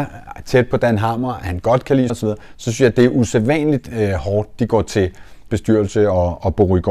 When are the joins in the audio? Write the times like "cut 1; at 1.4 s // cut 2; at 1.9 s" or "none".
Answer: cut 1; at 2.1 s // cut 2; at 5.5 s